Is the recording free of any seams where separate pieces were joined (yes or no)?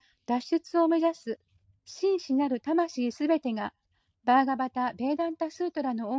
yes